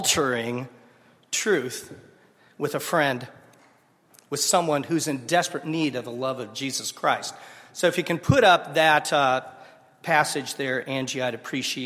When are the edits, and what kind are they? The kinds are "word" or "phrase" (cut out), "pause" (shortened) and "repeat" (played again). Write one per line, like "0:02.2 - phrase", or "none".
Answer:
none